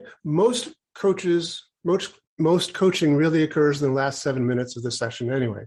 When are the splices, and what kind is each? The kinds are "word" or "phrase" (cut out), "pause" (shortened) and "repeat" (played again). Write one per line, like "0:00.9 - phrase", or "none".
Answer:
0:02.3 - pause